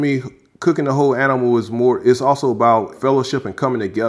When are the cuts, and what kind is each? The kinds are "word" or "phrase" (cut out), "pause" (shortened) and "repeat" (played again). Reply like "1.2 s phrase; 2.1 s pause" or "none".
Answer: none